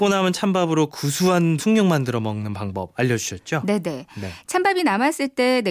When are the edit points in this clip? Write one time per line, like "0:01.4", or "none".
0:01.6